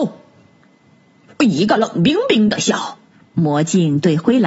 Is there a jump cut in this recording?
yes; 1 cut; at 3.1 s

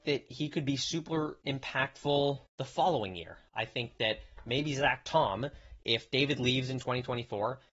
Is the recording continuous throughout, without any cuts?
no; 1 cut; at 2.5 s

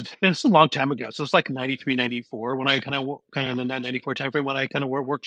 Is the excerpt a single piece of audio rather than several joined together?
yes; 0 cuts

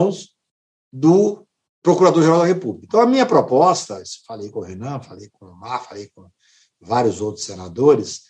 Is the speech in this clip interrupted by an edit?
no; 0 cuts

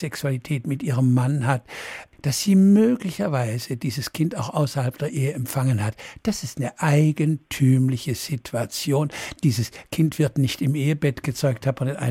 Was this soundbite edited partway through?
no; 0 cuts

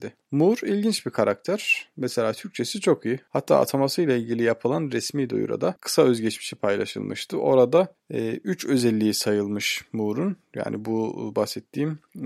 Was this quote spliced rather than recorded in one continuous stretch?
no; 0 cuts

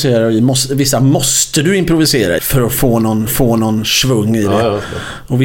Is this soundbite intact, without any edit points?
no; 2 cuts; at 2.4 s, 3.3 s

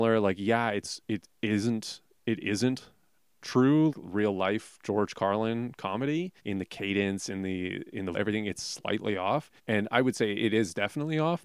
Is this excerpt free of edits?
no; 4 cuts; at 3.9 s, 6.4 s, 8.1 s, 9.6 s

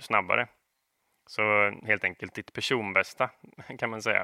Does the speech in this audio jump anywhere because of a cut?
no; 0 cuts

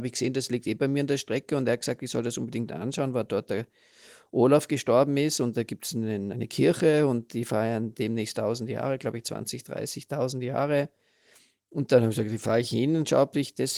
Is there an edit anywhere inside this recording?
no; 0 cuts

